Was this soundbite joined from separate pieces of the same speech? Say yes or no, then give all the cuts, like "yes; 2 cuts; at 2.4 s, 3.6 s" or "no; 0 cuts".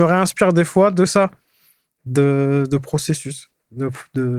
no; 0 cuts